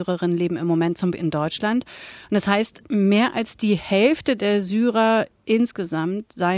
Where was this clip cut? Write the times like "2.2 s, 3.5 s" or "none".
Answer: 1.1 s

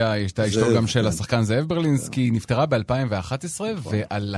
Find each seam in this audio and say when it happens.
none

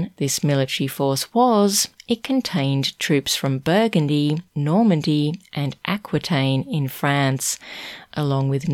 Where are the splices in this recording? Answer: 4.5 s

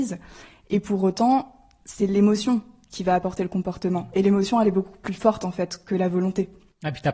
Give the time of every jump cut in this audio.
none

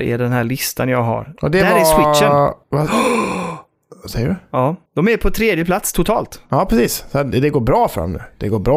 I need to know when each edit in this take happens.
2.6 s, 4.9 s

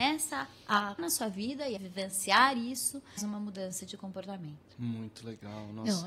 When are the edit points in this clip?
1.0 s, 1.8 s, 3.2 s

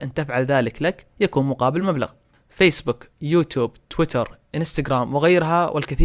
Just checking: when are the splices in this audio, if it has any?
none

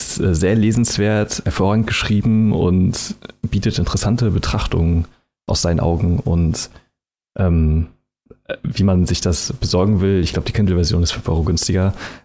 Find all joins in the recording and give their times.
none

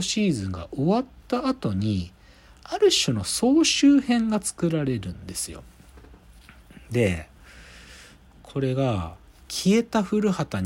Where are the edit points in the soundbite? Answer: none

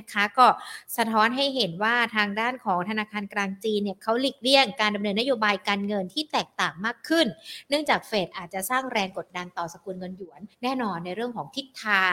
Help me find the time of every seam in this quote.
10.5 s

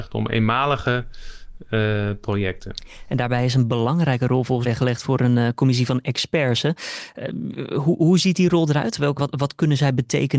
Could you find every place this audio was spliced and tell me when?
4.6 s, 9.2 s

